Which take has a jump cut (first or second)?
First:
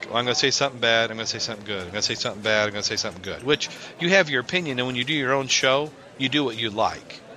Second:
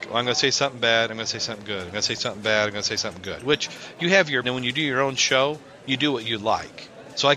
second